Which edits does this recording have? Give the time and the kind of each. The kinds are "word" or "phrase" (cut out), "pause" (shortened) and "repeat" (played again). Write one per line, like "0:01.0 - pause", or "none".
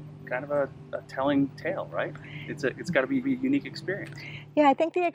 0:03.2 - repeat